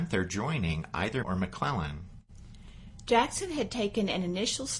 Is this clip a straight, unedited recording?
no; 1 cut; at 1.2 s

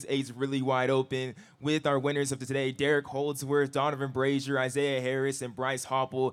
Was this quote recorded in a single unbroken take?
yes; 0 cuts

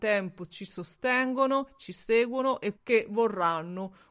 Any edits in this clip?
yes; 1 cut; at 2.7 s

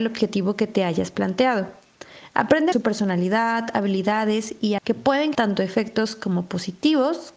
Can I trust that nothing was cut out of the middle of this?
no; 3 cuts; at 2.7 s, 4.8 s, 5.3 s

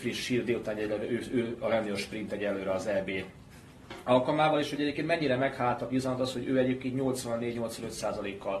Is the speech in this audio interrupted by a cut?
no; 0 cuts

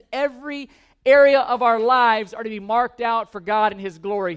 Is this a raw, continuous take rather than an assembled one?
yes; 0 cuts

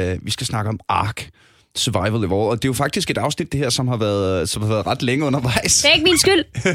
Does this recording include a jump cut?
no; 0 cuts

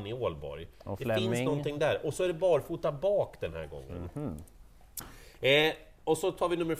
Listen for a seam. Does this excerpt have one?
no; 0 cuts

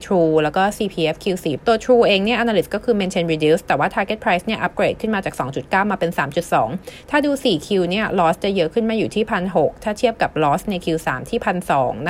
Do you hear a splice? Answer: yes; 1 cut; at 1.6 s

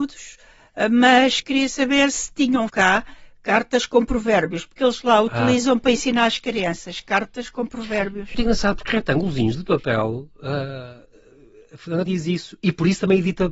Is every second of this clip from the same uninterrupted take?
no; 6 cuts; at 1.4 s, 2.1 s, 2.7 s, 8.3 s, 8.9 s, 12.1 s

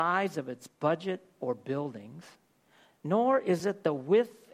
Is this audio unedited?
yes; 0 cuts

